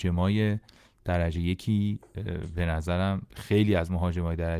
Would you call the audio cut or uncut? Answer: uncut